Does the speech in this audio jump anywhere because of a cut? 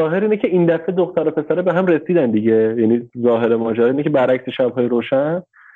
no; 0 cuts

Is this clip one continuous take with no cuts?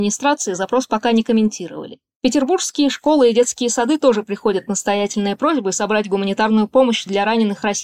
yes; 0 cuts

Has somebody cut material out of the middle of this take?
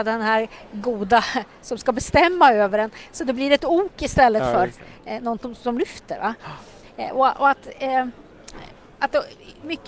no; 0 cuts

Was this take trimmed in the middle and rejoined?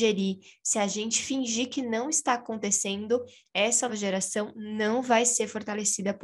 yes; 1 cut; at 3.9 s

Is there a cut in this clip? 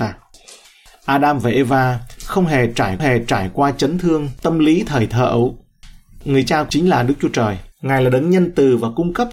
yes; 3 cuts; at 3.0 s, 6.7 s, 7.7 s

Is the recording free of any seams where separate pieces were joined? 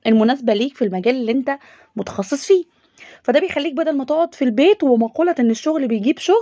yes; 0 cuts

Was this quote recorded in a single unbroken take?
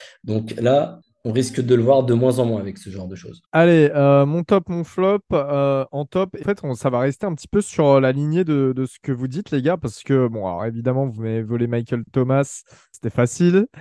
no; 2 cuts; at 3.5 s, 6.4 s

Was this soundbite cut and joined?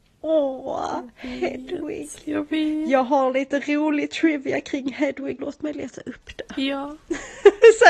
yes; 1 cut; at 5.4 s

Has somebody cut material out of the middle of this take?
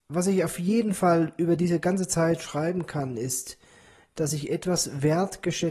no; 0 cuts

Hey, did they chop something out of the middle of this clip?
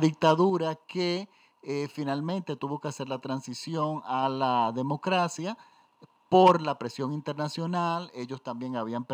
no; 0 cuts

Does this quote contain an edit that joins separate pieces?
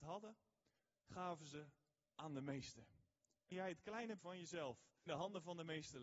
yes; 3 cuts; at 3.5 s, 4.2 s, 5.1 s

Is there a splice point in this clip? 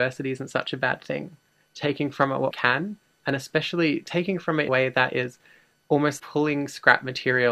yes; 3 cuts; at 2.5 s, 4.7 s, 6.2 s

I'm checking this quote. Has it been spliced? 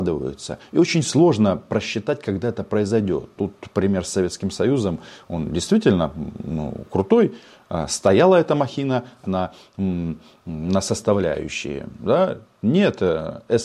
yes; 1 cut; at 9.2 s

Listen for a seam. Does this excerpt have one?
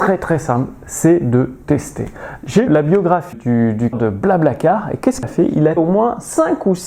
yes; 6 cuts; at 1.6 s, 2.7 s, 3.3 s, 3.9 s, 5.2 s, 5.8 s

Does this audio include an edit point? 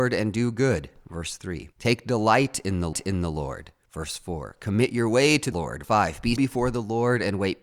yes; 5 cuts; at 1.7 s, 2.9 s, 5.5 s, 5.8 s, 6.4 s

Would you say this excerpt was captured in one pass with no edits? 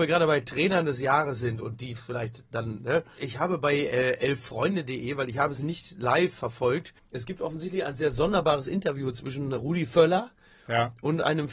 no; 2 cuts; at 3.2 s, 7.0 s

